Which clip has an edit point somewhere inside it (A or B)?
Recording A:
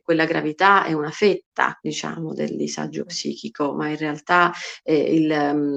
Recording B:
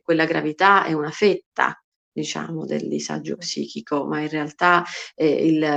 A